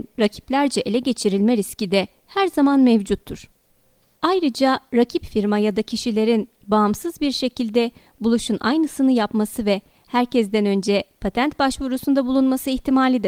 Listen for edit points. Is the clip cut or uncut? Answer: uncut